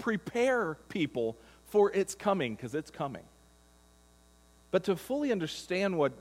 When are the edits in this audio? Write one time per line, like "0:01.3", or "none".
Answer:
none